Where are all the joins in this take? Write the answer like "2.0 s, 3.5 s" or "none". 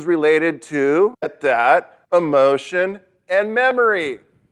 1.2 s, 2.0 s